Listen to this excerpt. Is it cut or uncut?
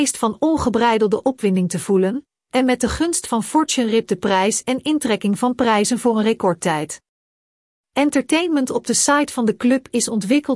uncut